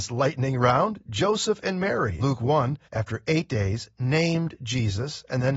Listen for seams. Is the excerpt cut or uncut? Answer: cut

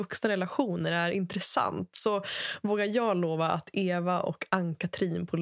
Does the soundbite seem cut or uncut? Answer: uncut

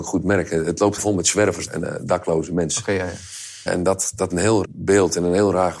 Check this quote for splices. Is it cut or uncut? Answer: cut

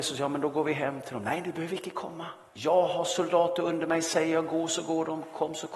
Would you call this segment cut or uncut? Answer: cut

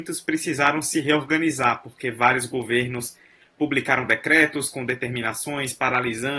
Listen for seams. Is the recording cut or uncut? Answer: uncut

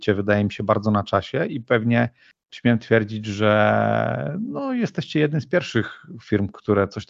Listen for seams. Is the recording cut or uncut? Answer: uncut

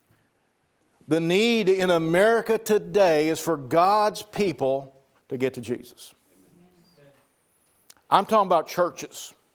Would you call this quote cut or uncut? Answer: uncut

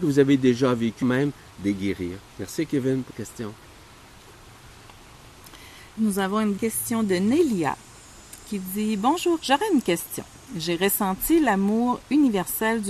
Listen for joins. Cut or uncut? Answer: cut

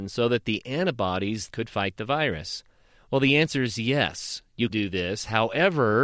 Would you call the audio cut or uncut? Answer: cut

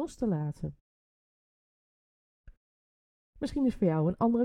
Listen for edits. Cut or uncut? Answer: uncut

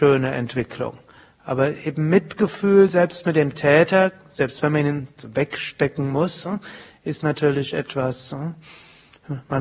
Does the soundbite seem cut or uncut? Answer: uncut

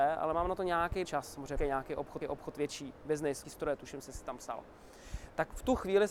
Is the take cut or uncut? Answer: cut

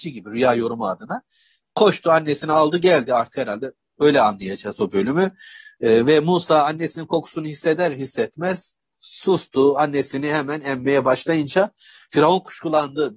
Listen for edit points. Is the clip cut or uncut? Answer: uncut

